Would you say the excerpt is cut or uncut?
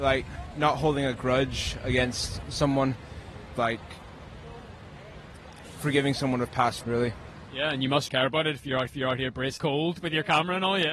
cut